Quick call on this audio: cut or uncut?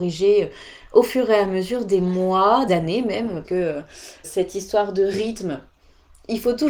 cut